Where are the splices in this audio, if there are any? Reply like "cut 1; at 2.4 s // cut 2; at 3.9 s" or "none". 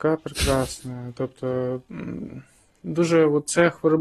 none